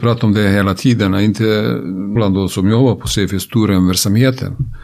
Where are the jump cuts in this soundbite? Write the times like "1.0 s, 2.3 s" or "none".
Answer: 2.2 s